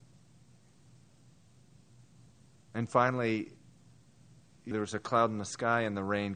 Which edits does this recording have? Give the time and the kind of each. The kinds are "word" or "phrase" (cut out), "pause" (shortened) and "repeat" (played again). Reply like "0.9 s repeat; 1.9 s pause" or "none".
4.7 s word